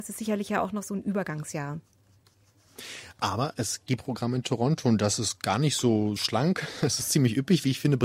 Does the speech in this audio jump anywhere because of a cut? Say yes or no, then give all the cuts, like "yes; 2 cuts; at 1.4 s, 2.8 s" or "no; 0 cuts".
yes; 2 cuts; at 4.0 s, 6.2 s